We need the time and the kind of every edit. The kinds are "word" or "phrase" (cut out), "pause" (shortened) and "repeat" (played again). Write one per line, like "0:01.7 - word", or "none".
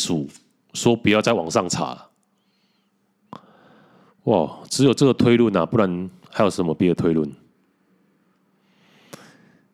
none

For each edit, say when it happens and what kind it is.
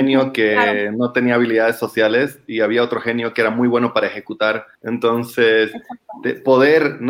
0:04.7 - pause

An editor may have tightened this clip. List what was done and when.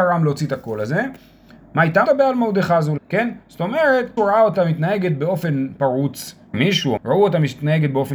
0:02.1 - word
0:03.0 - word
0:04.2 - word
0:06.5 - word
0:07.0 - word

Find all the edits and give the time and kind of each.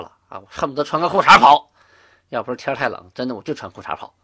none

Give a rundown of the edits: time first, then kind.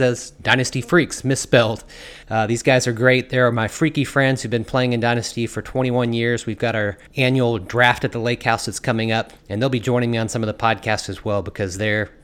0:02.2 - pause
0:07.1 - pause
0:09.4 - pause

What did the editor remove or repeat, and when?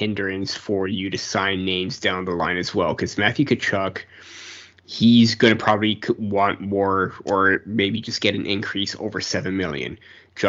none

